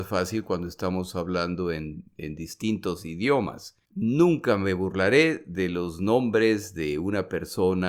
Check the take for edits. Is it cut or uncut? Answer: cut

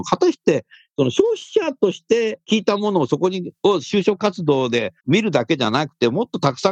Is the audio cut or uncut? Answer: cut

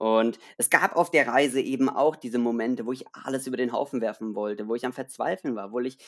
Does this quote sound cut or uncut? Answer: uncut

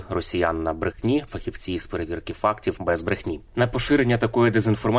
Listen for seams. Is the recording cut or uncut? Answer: cut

